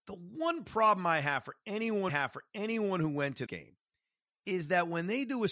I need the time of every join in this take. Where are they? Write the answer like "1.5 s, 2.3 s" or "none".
2.1 s, 3.5 s